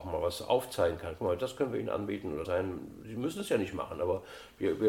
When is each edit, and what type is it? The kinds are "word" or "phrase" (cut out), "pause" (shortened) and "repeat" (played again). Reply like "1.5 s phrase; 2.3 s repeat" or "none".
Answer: 2.4 s phrase